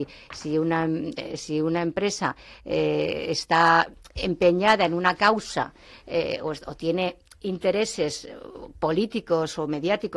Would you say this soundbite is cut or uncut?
uncut